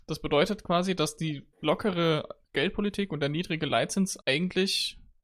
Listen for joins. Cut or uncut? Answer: cut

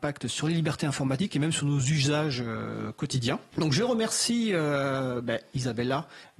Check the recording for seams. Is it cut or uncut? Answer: uncut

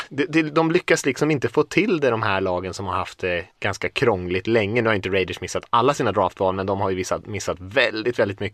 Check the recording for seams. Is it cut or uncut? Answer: cut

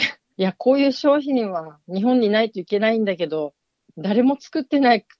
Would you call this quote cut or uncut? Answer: uncut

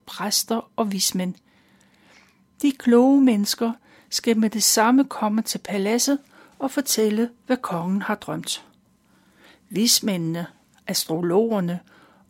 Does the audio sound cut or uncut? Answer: uncut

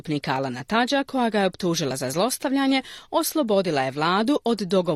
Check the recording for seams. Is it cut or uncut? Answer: uncut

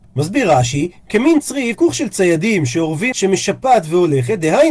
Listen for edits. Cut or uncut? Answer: cut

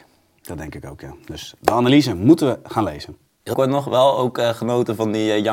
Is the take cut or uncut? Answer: cut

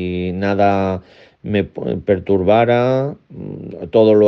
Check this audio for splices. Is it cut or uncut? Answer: uncut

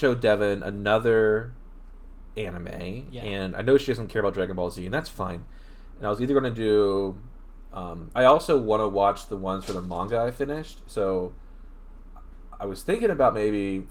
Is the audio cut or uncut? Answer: cut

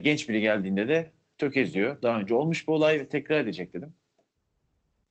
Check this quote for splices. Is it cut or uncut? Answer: uncut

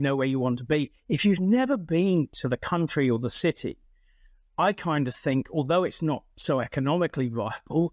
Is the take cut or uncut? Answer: uncut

